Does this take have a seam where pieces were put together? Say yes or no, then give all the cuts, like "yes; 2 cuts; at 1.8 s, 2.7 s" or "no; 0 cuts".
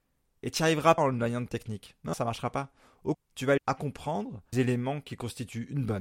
yes; 6 cuts; at 1.0 s, 1.5 s, 2.1 s, 3.1 s, 3.6 s, 4.5 s